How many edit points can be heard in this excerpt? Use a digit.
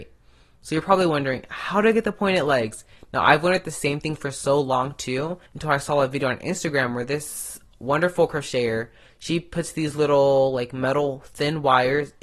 1